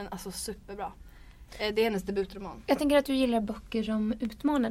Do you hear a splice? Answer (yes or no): no